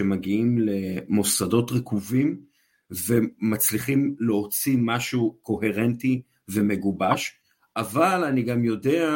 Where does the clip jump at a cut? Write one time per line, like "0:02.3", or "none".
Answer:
none

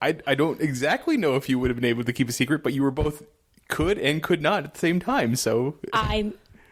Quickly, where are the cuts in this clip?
none

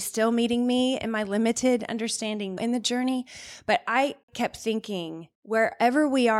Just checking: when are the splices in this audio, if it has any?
0:02.6
0:04.2
0:05.4

